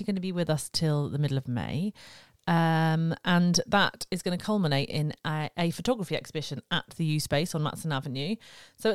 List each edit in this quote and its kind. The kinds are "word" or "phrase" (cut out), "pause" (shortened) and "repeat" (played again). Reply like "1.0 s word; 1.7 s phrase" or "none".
none

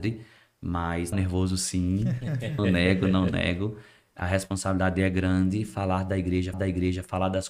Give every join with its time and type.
1.1 s word; 2.6 s word; 6.5 s repeat

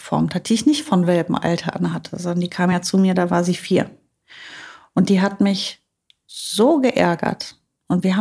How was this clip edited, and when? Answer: none

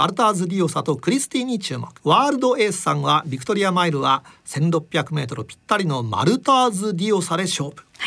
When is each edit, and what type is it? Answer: 2.0 s pause

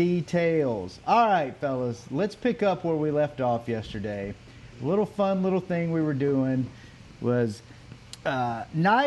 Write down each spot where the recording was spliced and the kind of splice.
4.7 s pause

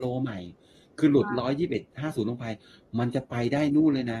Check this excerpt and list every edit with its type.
none

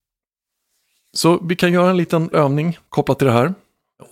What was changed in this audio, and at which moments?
2.3 s word; 2.9 s pause

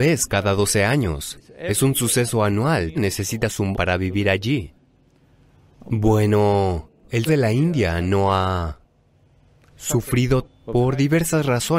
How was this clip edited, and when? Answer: 2.9 s word; 3.7 s word; 7.3 s word; 10.4 s word

